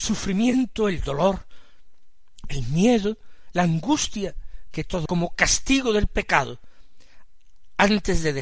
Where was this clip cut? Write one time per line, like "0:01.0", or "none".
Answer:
0:05.1